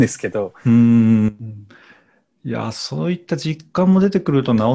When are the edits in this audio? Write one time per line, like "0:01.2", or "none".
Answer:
none